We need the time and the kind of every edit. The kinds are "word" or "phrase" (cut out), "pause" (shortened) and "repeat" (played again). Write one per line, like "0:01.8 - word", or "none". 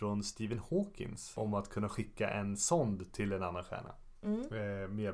none